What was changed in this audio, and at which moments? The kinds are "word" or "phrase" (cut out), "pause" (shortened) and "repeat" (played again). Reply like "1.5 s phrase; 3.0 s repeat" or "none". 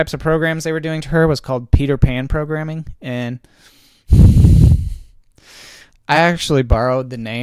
none